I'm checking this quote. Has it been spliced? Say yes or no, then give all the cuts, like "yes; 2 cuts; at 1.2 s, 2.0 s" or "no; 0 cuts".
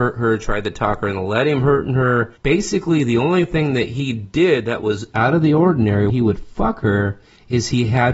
yes; 1 cut; at 6.1 s